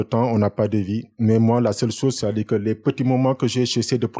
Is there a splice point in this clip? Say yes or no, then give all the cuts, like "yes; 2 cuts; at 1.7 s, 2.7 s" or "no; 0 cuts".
no; 0 cuts